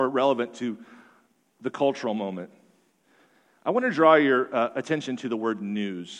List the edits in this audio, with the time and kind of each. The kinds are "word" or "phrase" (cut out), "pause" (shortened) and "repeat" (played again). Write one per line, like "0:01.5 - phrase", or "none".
none